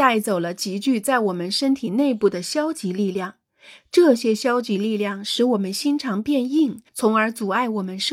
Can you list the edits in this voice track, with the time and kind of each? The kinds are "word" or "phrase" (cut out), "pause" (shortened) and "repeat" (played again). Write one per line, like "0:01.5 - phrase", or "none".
0:06.9 - pause